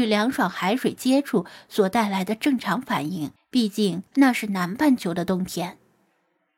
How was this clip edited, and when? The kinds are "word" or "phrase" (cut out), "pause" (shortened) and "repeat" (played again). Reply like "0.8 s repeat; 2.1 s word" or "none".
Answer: 3.4 s pause; 4.1 s pause